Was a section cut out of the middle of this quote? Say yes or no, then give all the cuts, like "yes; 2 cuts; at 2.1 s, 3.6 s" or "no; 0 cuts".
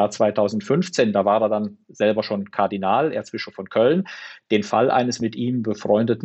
no; 0 cuts